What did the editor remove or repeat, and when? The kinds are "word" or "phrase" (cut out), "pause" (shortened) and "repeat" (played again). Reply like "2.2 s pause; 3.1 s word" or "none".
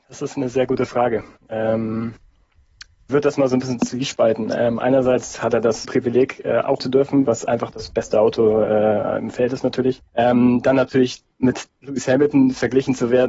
3.1 s word; 5.8 s phrase; 6.8 s phrase; 10.1 s pause; 11.3 s pause